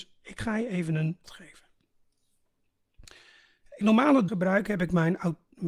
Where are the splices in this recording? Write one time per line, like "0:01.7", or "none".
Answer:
0:01.2
0:03.8
0:04.3